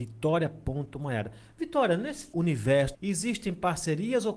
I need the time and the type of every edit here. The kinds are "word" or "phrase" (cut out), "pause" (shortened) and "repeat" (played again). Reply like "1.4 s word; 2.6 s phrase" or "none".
2.3 s word; 2.9 s phrase